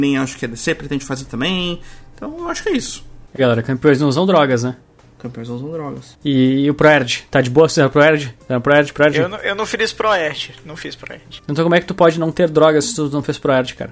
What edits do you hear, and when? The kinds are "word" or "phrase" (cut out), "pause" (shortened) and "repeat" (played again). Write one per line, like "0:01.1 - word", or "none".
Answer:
0:03.4 - phrase

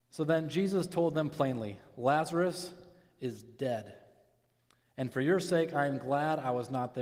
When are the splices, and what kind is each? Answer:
none

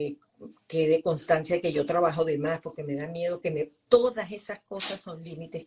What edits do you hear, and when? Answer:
0:03.8 - pause

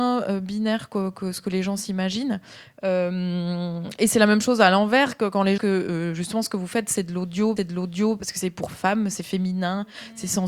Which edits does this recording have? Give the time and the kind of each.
0:05.6 - phrase
0:07.6 - repeat

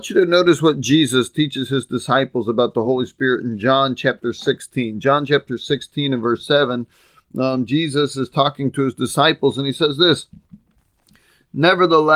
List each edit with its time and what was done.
none

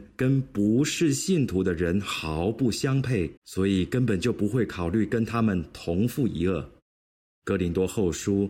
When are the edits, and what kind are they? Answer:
0:03.4 - pause
0:07.2 - pause

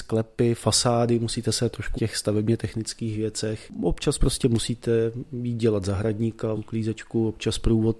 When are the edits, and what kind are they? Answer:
0:02.0 - phrase
0:06.5 - word

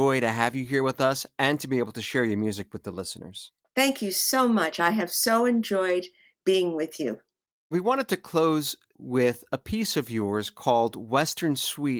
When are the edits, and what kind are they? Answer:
none

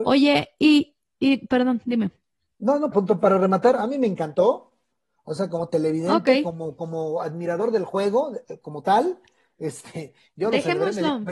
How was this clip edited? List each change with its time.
0:02.9 - word

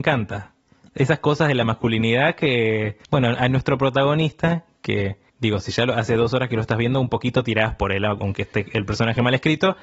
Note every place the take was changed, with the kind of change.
0:03.0 - pause
0:05.3 - pause

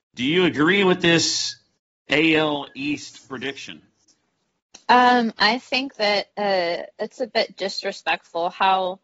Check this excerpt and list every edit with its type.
0:01.8 - pause
0:06.3 - pause

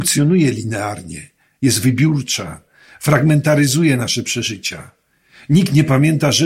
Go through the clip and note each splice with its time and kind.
none

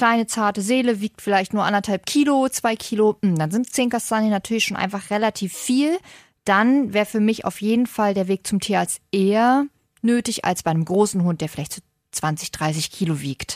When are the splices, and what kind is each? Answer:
none

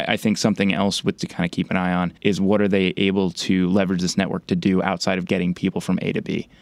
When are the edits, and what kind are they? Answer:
0:01.2 - phrase
0:02.2 - pause
0:05.3 - word

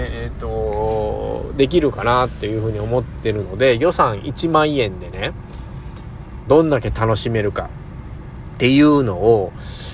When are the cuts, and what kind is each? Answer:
0:06.5 - phrase

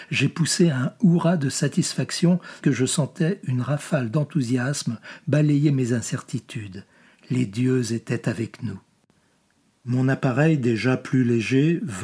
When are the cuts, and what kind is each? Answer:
0:02.6 - word

